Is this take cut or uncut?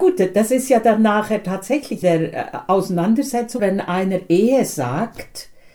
cut